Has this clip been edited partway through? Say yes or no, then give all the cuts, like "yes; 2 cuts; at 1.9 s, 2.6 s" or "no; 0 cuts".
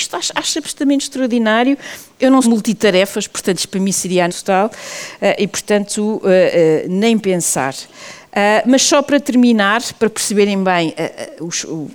yes; 2 cuts; at 2.4 s, 4.3 s